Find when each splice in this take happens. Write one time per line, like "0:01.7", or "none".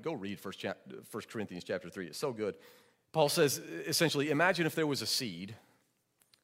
0:02.9

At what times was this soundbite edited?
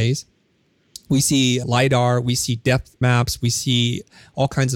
0:01.6
0:03.0

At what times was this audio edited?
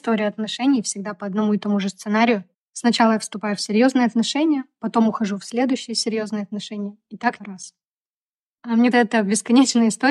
0:02.5
0:07.4
0:08.9

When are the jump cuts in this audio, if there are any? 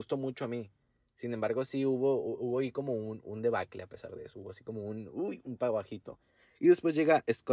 none

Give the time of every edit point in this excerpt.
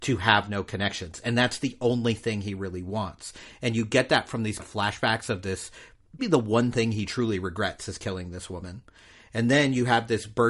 0:04.6
0:06.2

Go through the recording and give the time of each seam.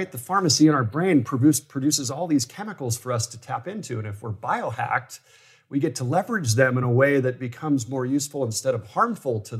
none

